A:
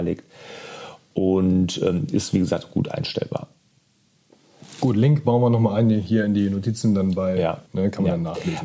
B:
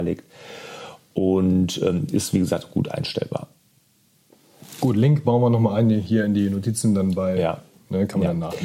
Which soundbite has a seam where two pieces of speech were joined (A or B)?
A